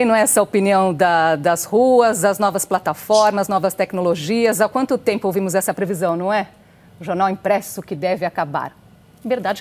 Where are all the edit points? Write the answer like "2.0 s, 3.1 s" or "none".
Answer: none